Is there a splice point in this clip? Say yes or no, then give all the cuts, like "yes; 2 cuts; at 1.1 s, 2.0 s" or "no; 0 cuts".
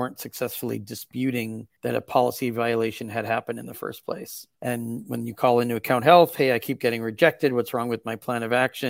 yes; 2 cuts; at 1.8 s, 4.5 s